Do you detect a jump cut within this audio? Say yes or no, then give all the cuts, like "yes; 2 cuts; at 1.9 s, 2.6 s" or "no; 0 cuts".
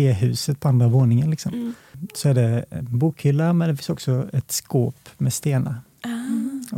no; 0 cuts